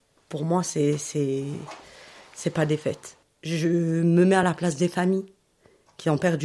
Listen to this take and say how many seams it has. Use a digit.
0